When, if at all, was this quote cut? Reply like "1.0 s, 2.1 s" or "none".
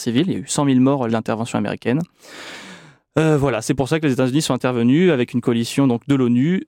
1.1 s